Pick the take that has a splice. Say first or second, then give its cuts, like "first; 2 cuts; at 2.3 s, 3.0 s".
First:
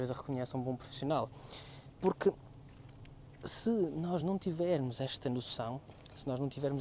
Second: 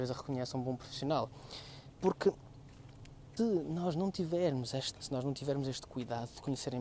second; 2 cuts; at 3.4 s, 4.9 s